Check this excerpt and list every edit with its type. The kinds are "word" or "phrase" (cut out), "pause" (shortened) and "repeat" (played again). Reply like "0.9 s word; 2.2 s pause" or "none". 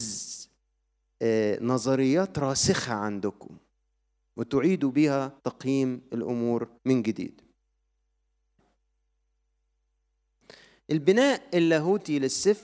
5.4 s pause; 6.8 s pause